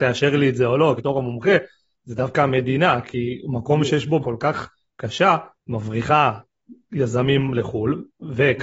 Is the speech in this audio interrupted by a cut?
yes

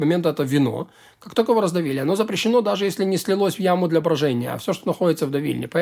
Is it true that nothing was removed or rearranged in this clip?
yes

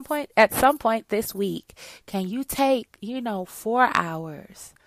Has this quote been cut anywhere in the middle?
no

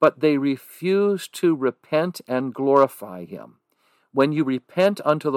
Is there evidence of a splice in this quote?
no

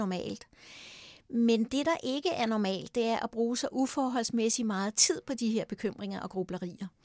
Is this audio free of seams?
yes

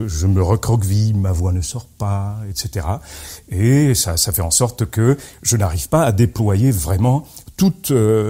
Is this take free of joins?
yes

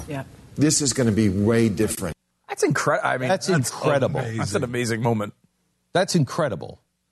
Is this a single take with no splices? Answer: yes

